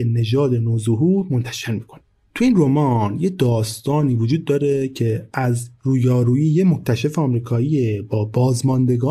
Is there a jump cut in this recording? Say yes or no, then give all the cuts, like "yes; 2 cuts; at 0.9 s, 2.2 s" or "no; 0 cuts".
no; 0 cuts